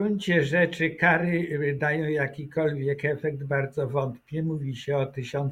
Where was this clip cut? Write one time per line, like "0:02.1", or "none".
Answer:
none